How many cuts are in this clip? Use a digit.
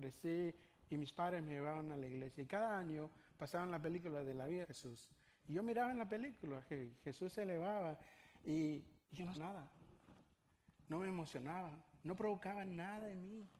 4